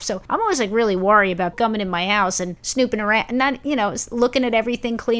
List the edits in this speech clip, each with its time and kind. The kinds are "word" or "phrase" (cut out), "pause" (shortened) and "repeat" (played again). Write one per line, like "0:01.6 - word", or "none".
0:01.5 - word